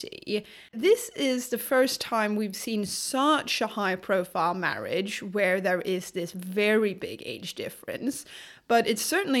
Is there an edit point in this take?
no; 0 cuts

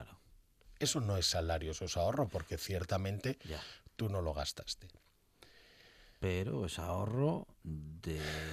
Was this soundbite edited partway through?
no; 0 cuts

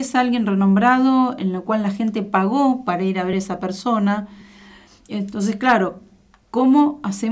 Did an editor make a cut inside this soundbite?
no; 0 cuts

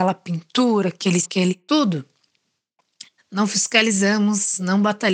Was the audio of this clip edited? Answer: yes; 2 cuts; at 1.2 s, 3.2 s

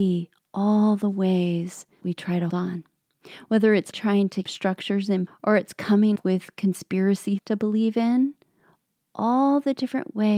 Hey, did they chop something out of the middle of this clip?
yes; 7 cuts; at 2.0 s, 2.5 s, 3.9 s, 4.4 s, 5.3 s, 6.2 s, 7.4 s

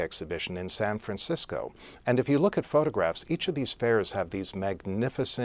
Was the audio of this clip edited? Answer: no; 0 cuts

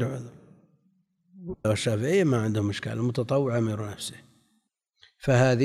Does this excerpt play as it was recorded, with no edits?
no; 1 cut; at 1.6 s

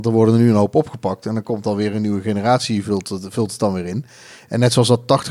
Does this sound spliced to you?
no; 0 cuts

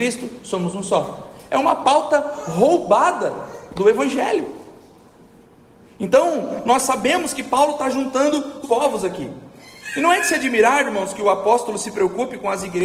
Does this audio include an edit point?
yes; 2 cuts; at 5.4 s, 8.6 s

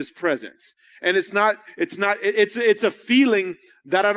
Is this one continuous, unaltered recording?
yes; 0 cuts

